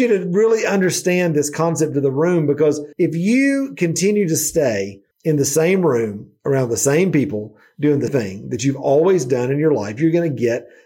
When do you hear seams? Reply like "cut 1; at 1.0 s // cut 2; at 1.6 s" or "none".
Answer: cut 1; at 2.9 s // cut 2; at 5.1 s // cut 3; at 8.1 s